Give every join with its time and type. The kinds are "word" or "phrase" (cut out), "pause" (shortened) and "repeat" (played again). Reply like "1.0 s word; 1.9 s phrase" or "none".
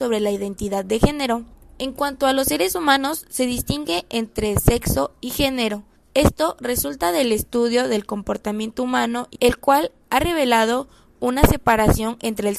1.5 s pause; 6.0 s pause; 9.4 s word